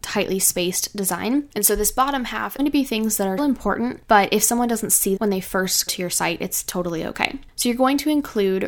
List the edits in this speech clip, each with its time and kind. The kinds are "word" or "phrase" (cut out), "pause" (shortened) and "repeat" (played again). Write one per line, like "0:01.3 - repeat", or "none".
0:02.6 - phrase
0:03.4 - word
0:05.2 - word
0:05.9 - word